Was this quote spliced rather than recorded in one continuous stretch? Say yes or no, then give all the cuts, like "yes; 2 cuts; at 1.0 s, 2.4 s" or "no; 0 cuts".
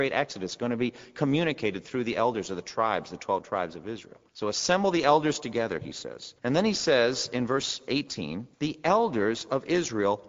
yes; 3 cuts; at 4.3 s, 6.4 s, 8.5 s